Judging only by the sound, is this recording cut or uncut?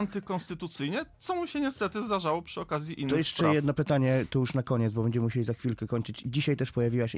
uncut